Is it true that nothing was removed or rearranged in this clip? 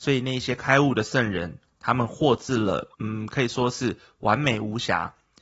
no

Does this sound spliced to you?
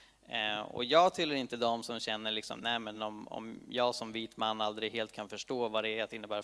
no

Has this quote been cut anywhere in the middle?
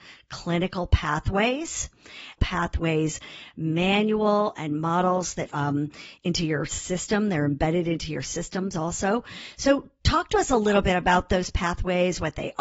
yes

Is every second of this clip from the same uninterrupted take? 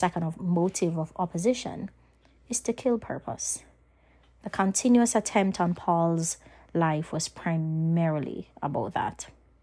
yes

